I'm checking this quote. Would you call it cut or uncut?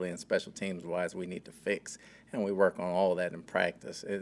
uncut